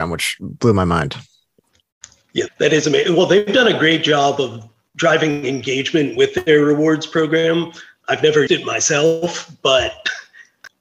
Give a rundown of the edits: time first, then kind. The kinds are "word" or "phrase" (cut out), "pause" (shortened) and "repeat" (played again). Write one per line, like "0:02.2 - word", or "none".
0:02.5 - word
0:08.5 - word